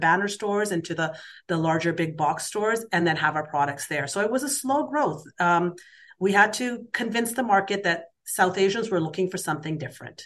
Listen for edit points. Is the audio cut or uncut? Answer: uncut